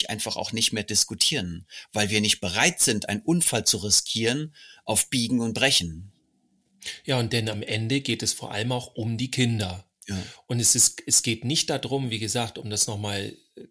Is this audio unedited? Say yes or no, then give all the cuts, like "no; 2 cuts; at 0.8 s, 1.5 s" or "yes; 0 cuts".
yes; 0 cuts